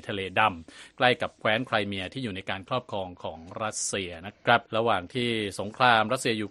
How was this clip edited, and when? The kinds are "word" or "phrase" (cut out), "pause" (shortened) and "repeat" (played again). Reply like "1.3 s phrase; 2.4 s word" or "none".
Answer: 4.7 s pause